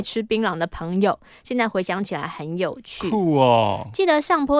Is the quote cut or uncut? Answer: uncut